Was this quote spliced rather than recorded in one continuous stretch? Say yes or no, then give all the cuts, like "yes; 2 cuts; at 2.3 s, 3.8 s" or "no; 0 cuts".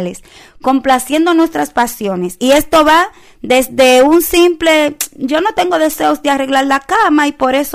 no; 0 cuts